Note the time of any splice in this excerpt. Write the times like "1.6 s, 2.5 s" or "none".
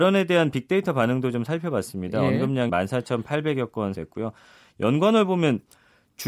2.7 s, 4.0 s